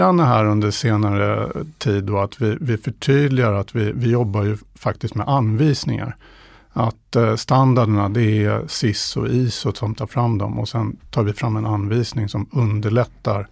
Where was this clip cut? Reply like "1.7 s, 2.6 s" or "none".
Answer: none